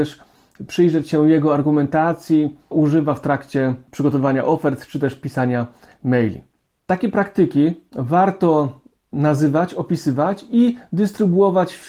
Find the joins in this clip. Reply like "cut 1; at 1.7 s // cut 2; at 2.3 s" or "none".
cut 1; at 2.7 s